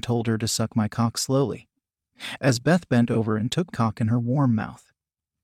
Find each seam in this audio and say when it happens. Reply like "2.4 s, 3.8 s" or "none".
3.7 s